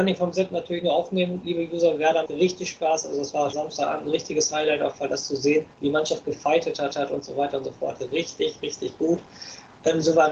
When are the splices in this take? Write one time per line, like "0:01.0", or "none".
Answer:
0:02.3
0:03.5
0:05.0
0:05.7
0:06.9